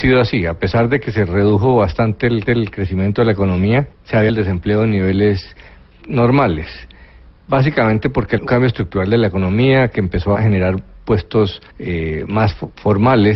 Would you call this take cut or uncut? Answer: cut